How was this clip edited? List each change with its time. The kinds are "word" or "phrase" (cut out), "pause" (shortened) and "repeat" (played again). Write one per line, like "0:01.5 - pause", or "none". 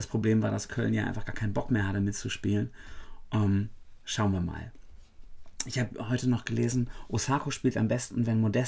none